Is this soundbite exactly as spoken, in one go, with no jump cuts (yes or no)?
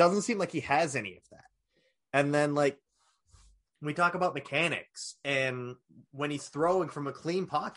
yes